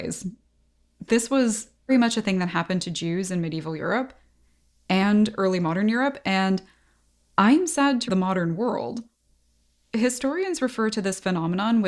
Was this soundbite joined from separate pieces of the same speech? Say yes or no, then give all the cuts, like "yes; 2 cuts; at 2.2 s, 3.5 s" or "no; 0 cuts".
yes; 2 cuts; at 1.9 s, 8.1 s